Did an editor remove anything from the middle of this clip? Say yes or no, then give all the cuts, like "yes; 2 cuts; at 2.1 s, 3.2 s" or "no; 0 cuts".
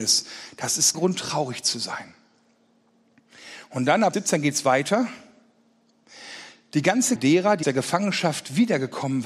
yes; 4 cuts; at 0.9 s, 4.1 s, 7.2 s, 7.6 s